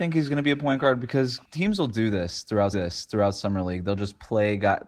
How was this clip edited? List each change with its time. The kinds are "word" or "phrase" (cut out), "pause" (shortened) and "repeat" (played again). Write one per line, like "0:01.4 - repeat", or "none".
0:01.4 - pause
0:02.7 - repeat